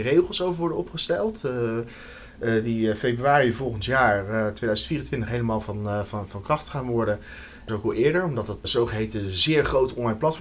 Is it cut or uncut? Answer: cut